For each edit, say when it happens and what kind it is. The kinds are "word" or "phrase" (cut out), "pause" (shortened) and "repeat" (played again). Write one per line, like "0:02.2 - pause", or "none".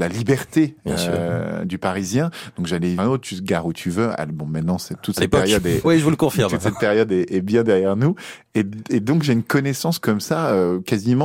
0:03.0 - phrase
0:05.8 - word